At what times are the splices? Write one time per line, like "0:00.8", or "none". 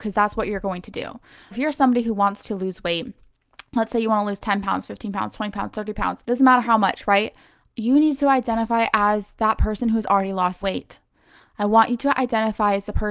0:01.5
0:06.2
0:10.6

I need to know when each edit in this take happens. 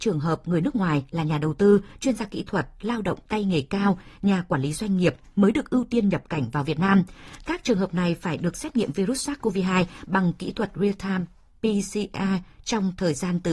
none

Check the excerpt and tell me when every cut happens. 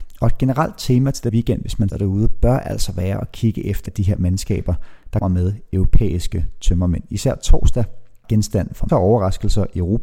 0:01.3
0:01.9
0:03.9
0:05.2
0:08.2
0:08.9

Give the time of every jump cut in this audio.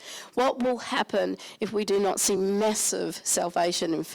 none

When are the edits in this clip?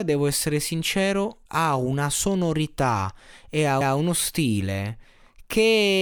0:01.5
0:03.8

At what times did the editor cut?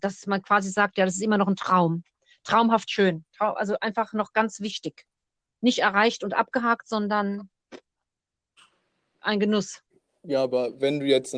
none

